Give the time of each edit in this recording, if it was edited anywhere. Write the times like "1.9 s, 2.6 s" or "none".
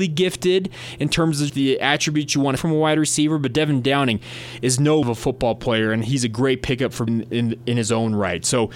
1.5 s, 2.6 s, 5.0 s, 7.1 s